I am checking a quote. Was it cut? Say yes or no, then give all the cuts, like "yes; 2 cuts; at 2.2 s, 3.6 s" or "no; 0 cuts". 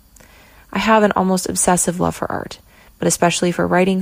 no; 0 cuts